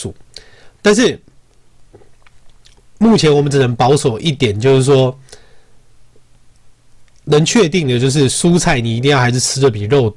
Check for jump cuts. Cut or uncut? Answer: uncut